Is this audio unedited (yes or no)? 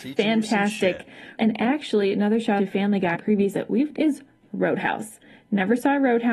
no